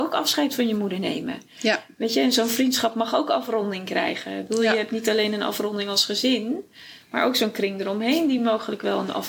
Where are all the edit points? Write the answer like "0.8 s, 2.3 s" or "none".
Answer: none